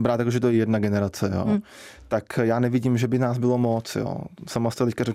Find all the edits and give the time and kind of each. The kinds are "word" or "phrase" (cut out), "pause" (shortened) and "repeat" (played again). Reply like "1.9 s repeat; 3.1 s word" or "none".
none